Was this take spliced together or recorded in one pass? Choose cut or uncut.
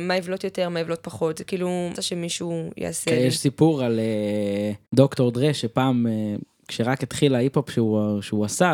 cut